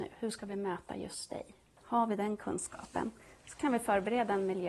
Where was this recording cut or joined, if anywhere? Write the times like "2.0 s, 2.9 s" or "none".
none